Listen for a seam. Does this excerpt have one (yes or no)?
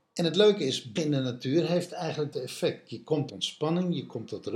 yes